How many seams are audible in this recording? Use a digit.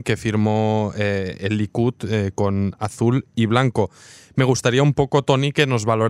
0